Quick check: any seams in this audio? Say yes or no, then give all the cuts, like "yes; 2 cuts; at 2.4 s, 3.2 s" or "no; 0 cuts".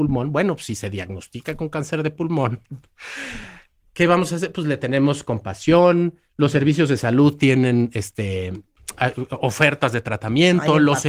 no; 0 cuts